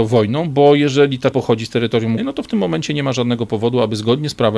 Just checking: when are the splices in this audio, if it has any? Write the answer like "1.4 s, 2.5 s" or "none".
1.3 s, 2.2 s